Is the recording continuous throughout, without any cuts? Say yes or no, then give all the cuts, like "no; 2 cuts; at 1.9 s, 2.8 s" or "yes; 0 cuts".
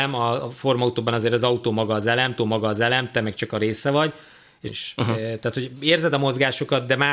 no; 2 cuts; at 2.4 s, 4.7 s